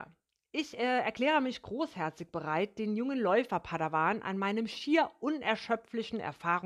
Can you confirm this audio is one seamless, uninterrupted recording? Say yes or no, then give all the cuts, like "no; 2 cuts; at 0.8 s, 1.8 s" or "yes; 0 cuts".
yes; 0 cuts